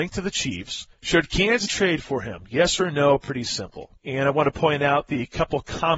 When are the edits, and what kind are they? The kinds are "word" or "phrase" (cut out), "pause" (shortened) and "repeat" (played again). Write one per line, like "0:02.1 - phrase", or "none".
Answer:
0:00.9 - pause
0:01.7 - word
0:04.0 - pause